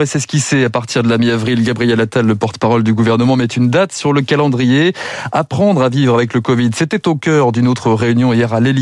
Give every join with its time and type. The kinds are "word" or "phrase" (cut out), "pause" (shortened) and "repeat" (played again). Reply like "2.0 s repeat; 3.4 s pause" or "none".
none